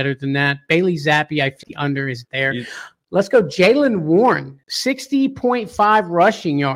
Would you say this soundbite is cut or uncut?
cut